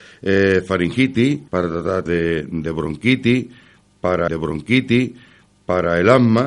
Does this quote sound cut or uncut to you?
cut